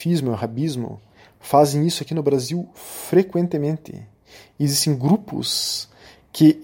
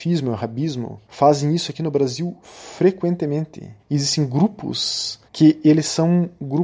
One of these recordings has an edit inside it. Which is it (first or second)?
second